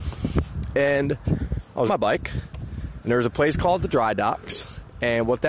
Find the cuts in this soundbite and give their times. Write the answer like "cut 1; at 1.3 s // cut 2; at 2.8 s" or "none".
cut 1; at 1.9 s